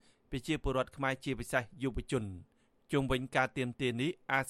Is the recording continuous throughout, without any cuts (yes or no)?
yes